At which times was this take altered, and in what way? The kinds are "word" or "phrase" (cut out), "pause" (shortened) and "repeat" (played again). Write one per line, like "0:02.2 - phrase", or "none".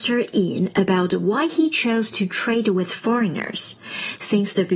none